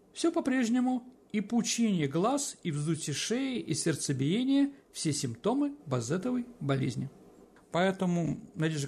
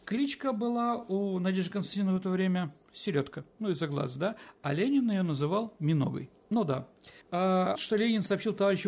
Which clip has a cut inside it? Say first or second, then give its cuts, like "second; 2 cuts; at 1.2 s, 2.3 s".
second; 2 cuts; at 7.2 s, 7.8 s